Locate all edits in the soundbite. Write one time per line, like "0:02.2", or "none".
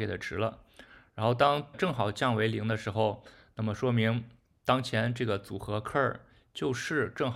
0:01.7